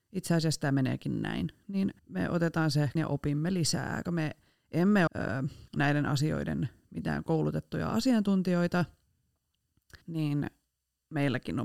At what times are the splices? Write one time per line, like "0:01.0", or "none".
0:02.0
0:03.0
0:04.0
0:05.1
0:05.7
0:10.0